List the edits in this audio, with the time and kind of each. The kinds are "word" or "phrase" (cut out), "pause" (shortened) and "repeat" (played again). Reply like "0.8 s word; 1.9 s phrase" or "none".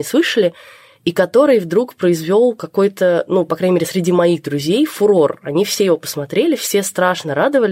none